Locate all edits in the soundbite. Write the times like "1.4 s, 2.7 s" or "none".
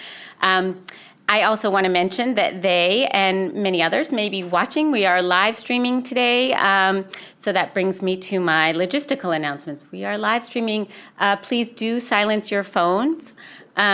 none